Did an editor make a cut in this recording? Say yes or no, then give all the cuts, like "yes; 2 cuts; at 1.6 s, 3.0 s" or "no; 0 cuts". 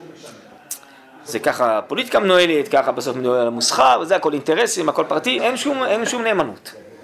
yes; 1 cut; at 5.4 s